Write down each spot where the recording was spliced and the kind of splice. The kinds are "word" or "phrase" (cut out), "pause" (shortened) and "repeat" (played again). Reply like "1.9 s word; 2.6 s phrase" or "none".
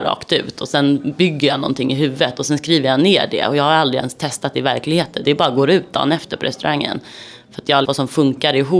5.2 s word; 7.8 s phrase